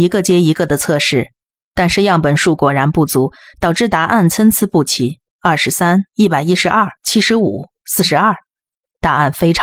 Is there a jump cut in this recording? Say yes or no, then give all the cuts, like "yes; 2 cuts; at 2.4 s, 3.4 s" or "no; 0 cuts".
yes; 3 cuts; at 5.3 s, 6.1 s, 7.0 s